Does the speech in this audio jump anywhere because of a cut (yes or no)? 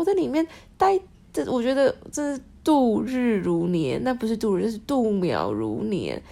no